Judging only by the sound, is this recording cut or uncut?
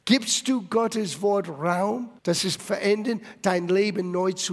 cut